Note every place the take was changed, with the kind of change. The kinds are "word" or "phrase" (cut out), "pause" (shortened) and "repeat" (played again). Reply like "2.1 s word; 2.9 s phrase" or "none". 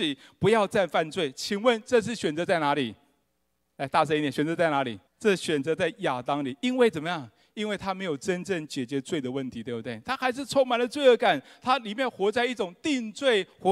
5.1 s pause